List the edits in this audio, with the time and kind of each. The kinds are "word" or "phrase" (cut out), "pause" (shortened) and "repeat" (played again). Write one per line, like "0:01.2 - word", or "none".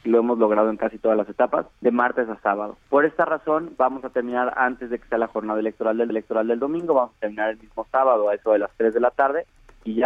0:01.7 - pause
0:02.8 - pause
0:06.1 - repeat